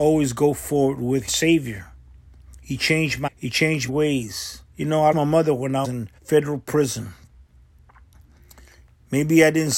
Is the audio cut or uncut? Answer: cut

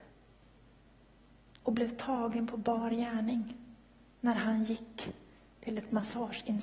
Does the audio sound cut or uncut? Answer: uncut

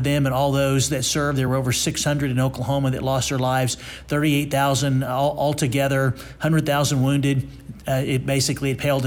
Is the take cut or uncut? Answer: uncut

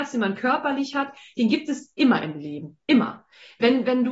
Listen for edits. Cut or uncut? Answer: uncut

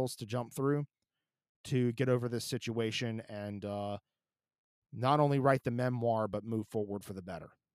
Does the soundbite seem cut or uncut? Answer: uncut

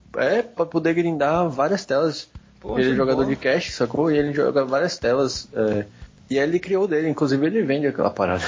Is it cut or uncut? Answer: uncut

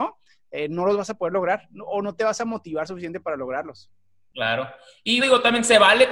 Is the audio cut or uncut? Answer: cut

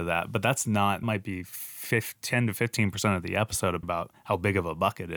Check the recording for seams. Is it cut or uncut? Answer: cut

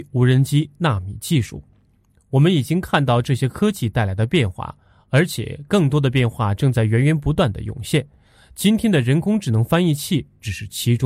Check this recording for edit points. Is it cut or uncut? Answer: uncut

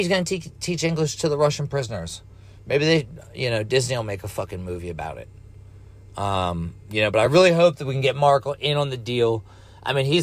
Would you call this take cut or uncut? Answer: uncut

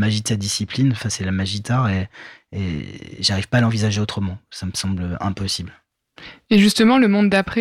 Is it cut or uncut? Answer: cut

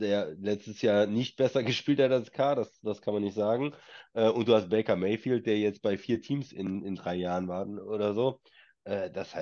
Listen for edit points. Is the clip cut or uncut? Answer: uncut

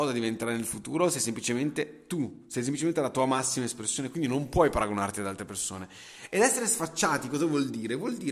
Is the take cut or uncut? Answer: uncut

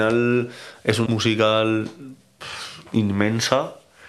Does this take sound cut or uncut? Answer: cut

